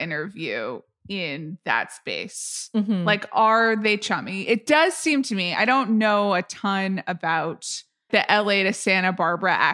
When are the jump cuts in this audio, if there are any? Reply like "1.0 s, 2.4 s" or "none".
8.1 s